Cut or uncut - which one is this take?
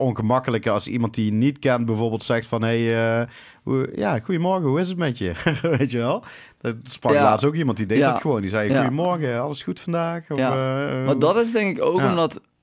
uncut